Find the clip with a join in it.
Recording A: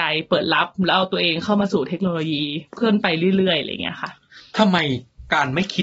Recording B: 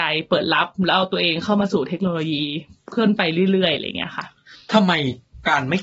A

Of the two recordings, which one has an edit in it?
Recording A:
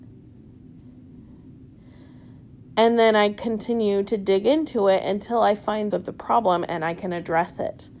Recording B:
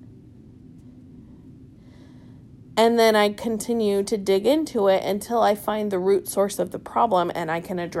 A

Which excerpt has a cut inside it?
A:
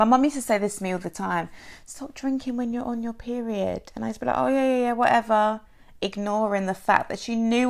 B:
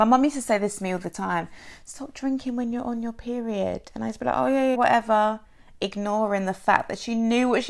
B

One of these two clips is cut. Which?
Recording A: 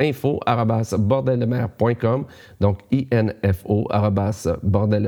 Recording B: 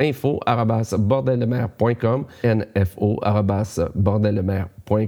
B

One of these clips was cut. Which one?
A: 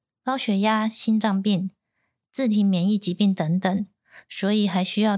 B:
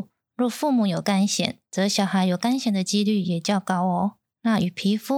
B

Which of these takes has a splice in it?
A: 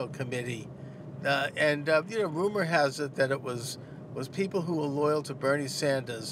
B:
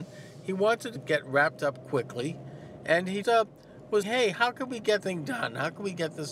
B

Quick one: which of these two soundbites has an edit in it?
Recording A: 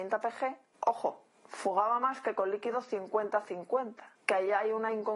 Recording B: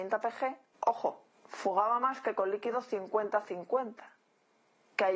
A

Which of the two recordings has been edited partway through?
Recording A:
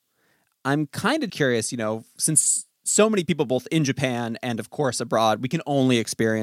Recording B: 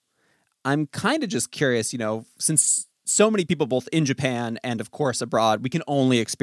A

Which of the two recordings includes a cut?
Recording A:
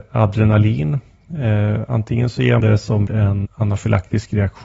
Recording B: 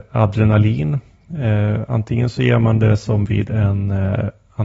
A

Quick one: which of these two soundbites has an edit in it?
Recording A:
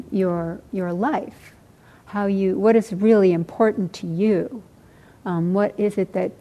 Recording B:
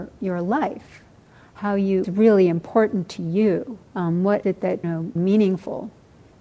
B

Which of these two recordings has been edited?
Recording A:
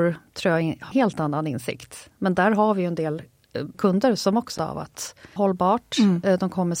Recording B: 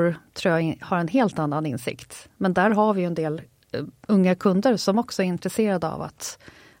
A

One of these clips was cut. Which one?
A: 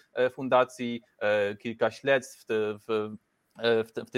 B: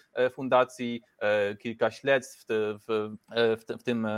B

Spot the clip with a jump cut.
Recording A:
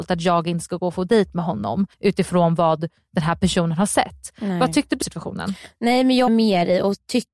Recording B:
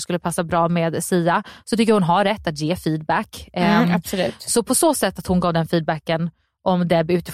A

